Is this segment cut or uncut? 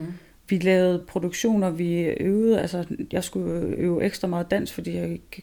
uncut